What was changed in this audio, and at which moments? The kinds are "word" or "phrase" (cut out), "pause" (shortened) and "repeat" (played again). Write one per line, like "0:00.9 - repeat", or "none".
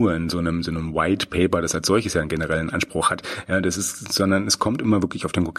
none